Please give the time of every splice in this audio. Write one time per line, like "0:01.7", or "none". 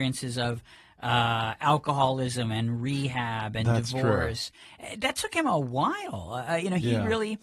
none